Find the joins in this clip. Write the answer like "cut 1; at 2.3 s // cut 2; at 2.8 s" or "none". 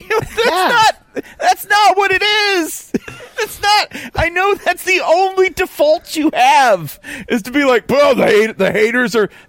none